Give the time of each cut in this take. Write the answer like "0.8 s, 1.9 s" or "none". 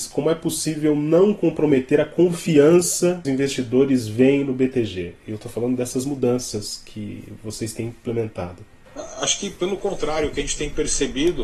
3.2 s

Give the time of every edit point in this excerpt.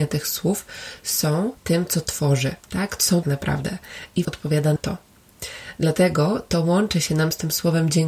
1.6 s, 2.6 s, 3.2 s, 4.2 s, 4.8 s

